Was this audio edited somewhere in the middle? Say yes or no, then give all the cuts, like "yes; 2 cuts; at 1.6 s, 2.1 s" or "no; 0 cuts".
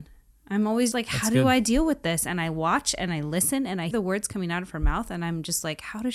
yes; 2 cuts; at 0.9 s, 3.9 s